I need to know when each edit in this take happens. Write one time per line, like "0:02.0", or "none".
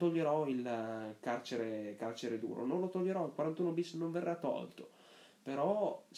none